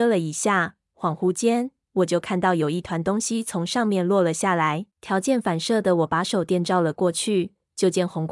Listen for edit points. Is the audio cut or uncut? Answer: cut